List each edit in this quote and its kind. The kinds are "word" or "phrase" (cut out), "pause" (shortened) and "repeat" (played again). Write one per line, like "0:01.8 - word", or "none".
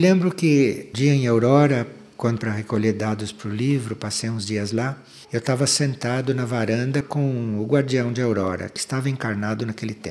0:00.9 - word
0:02.4 - phrase
0:05.2 - pause

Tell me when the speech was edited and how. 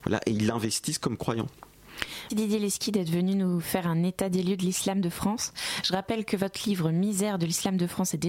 0:02.3 - word

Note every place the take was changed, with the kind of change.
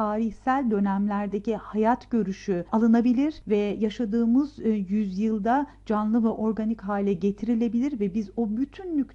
none

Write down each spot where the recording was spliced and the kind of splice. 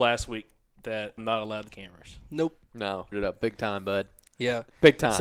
0:01.2 - word
0:01.7 - word
0:03.1 - word

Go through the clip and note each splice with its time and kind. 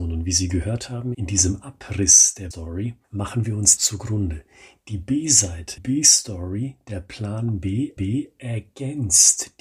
0:01.1 - phrase
0:02.5 - word
0:03.0 - pause
0:03.8 - phrase
0:05.8 - word
0:08.0 - repeat

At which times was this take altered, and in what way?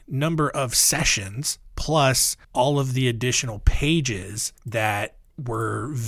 0:02.4 - pause
0:04.6 - pause

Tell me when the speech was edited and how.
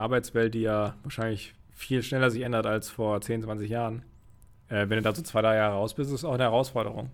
none

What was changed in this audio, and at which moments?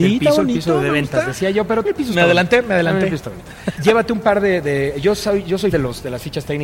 0:01.8 - word
0:03.8 - word
0:05.7 - word

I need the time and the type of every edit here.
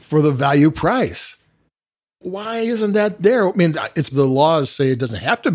0:04.1 - word

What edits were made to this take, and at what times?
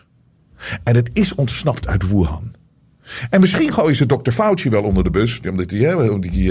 none

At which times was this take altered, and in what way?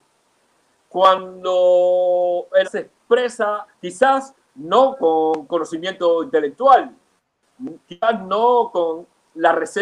0:02.6 - word
0:03.7 - pause

